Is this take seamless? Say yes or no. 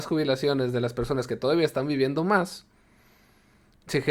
yes